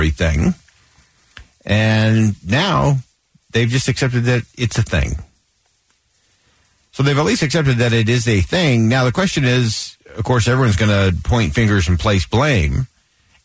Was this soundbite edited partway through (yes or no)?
no